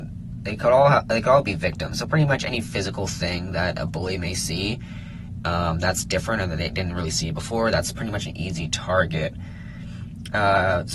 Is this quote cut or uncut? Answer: uncut